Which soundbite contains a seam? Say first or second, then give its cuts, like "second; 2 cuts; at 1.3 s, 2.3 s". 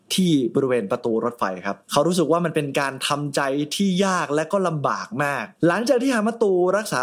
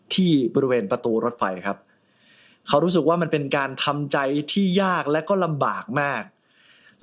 first; 2 cuts; at 1.8 s, 5.6 s